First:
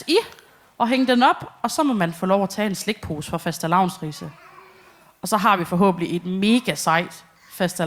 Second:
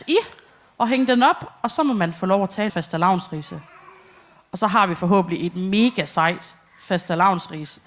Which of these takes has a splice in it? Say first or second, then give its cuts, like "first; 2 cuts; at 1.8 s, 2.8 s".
second; 1 cut; at 2.7 s